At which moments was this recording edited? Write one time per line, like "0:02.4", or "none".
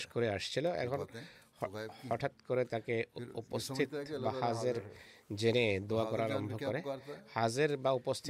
none